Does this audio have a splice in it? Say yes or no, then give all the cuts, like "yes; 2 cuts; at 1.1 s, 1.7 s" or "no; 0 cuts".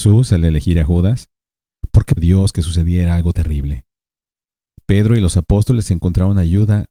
yes; 3 cuts; at 2.2 s, 3.3 s, 5.3 s